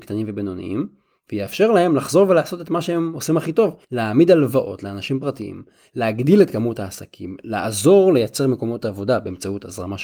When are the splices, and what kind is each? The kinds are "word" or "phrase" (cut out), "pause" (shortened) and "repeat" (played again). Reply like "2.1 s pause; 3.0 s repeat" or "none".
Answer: 3.8 s pause